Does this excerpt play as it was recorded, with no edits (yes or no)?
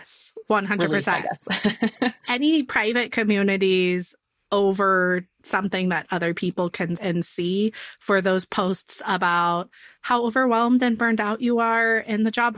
no